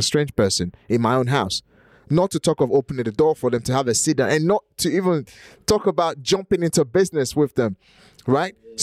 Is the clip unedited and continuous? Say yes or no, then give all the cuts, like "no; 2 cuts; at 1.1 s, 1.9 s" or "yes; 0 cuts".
yes; 0 cuts